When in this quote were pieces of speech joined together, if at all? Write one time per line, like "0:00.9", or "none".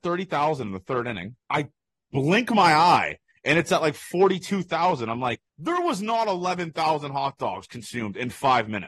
0:01.4
0:05.5